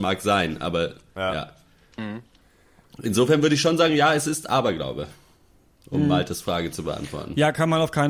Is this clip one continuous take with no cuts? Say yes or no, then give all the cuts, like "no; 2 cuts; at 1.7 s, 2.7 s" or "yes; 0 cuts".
yes; 0 cuts